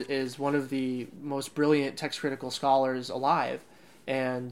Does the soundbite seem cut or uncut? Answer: uncut